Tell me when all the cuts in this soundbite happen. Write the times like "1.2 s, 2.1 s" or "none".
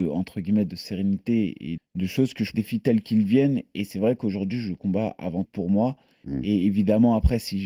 1.8 s, 2.5 s, 5.5 s